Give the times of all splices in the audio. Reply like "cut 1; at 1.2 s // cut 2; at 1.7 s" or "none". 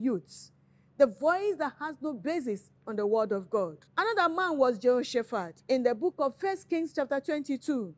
cut 1; at 2.8 s // cut 2; at 3.9 s // cut 3; at 5.6 s

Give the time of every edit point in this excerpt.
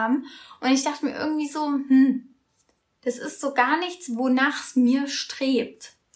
none

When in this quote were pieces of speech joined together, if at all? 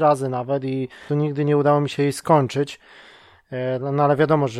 cut 1; at 1.1 s

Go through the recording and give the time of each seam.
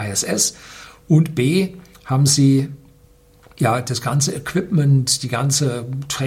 none

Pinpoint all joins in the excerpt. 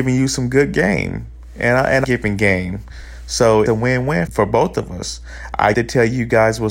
cut 1; at 2.0 s // cut 2; at 3.7 s // cut 3; at 4.3 s // cut 4; at 5.7 s

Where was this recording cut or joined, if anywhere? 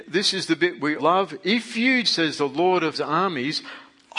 cut 1; at 1.0 s // cut 2; at 2.0 s // cut 3; at 2.9 s

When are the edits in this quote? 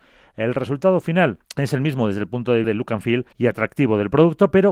cut 1; at 1.4 s // cut 2; at 2.6 s // cut 3; at 3.3 s

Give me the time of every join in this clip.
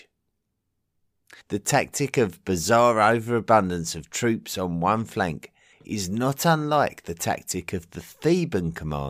cut 1; at 1.4 s // cut 2; at 5.7 s

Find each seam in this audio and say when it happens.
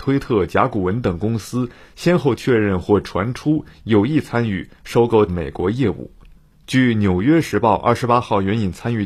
cut 1; at 5.3 s

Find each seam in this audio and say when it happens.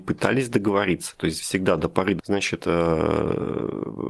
cut 1; at 2.2 s

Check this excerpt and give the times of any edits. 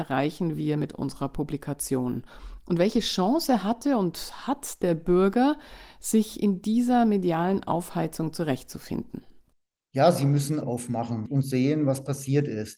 cut 1; at 9.5 s // cut 2; at 10.6 s

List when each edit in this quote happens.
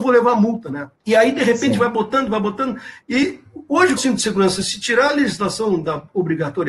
cut 1; at 1.0 s // cut 2; at 4.0 s

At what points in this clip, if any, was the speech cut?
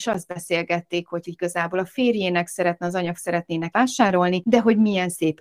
cut 1; at 1.2 s // cut 2; at 3.2 s // cut 3; at 3.7 s

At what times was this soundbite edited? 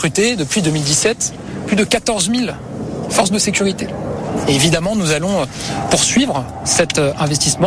none

